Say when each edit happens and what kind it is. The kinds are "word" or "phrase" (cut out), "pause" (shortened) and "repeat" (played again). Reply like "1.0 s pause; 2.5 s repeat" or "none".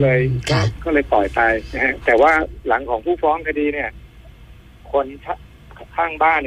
none